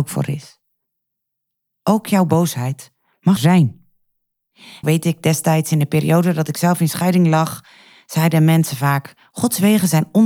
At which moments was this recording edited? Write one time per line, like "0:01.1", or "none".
0:03.4
0:04.8